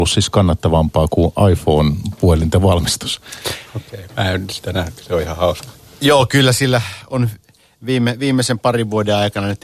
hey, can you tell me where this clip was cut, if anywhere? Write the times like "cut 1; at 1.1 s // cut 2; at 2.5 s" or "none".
none